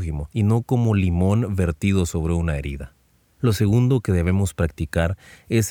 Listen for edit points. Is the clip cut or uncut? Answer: uncut